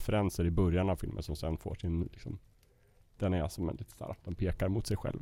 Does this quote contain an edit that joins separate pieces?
no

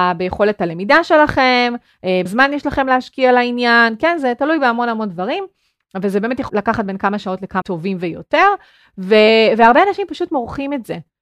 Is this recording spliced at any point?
yes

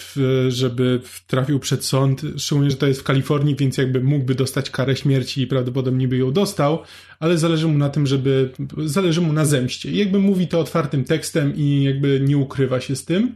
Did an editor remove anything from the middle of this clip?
no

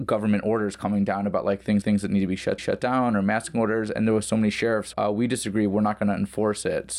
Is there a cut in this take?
yes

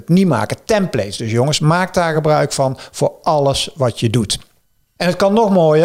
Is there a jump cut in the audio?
no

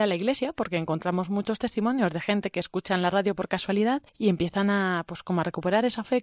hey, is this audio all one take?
no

